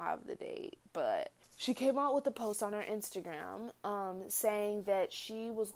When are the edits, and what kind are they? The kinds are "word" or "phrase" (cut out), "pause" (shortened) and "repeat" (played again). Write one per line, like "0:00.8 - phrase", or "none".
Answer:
0:01.4 - pause